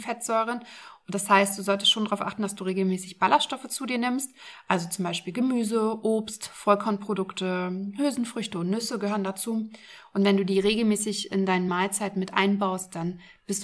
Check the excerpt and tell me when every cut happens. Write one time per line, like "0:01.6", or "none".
none